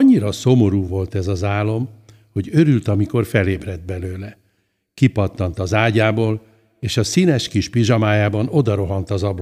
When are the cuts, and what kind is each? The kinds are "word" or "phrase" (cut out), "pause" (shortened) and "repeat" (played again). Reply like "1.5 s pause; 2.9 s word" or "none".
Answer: none